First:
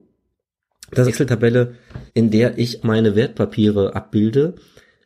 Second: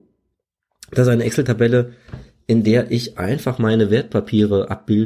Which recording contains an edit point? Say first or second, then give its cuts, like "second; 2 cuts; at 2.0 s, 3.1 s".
first; 3 cuts; at 1.1 s, 2.1 s, 2.8 s